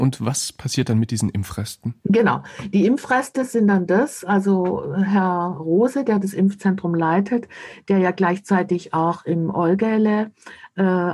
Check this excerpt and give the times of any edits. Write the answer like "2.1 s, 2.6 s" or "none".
2.0 s